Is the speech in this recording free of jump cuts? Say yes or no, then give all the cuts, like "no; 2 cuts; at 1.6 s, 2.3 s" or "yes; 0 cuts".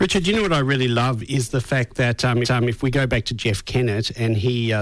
no; 1 cut; at 2.4 s